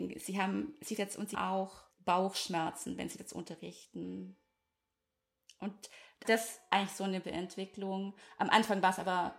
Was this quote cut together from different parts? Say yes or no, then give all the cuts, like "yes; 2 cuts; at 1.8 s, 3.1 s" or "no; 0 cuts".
yes; 7 cuts; at 1.0 s, 1.3 s, 1.9 s, 3.2 s, 6.2 s, 6.7 s, 7.2 s